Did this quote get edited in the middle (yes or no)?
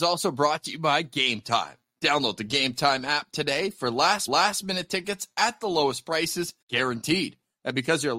yes